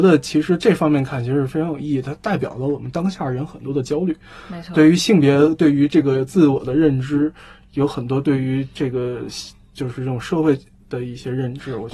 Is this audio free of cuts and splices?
yes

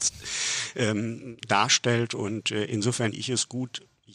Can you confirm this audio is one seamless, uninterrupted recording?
no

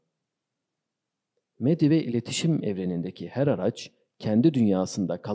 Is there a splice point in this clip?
no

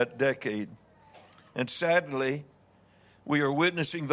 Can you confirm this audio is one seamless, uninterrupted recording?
yes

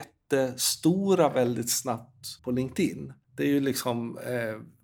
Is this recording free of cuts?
no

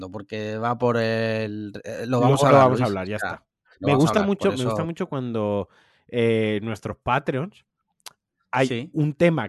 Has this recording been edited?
no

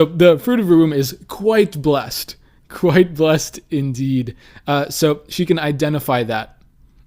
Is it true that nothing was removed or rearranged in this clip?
yes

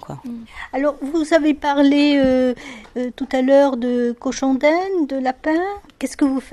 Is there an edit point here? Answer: no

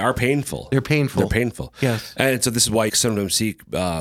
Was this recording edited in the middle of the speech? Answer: yes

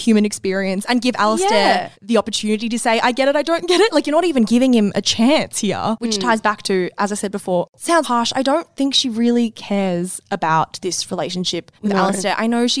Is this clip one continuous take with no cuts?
no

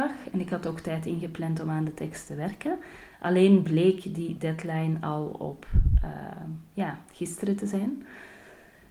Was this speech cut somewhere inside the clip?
no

